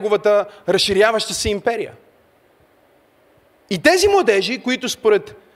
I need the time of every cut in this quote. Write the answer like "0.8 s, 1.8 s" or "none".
none